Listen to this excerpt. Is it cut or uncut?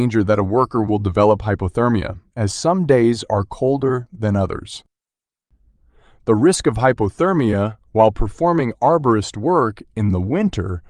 uncut